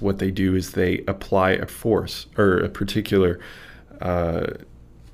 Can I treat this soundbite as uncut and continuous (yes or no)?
no